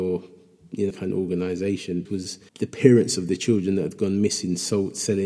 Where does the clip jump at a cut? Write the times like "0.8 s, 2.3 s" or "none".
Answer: 0.9 s, 2.1 s, 2.5 s